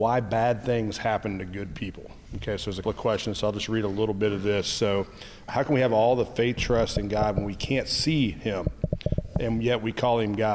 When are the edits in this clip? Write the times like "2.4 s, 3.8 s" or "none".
2.8 s, 5.5 s, 6.6 s